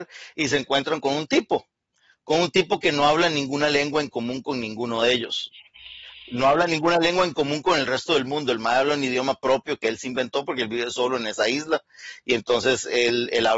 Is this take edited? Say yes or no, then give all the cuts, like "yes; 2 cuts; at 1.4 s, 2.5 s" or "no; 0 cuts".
no; 0 cuts